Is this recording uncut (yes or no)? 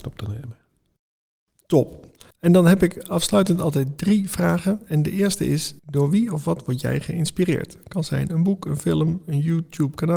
no